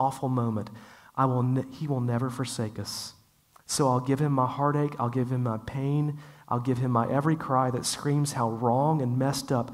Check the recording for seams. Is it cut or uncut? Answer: uncut